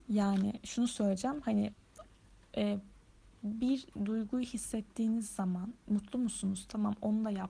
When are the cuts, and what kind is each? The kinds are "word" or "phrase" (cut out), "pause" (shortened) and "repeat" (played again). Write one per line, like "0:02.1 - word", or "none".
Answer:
none